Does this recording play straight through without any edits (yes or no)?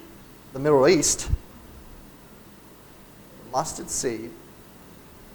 yes